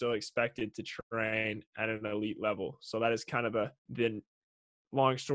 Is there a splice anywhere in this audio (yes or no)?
yes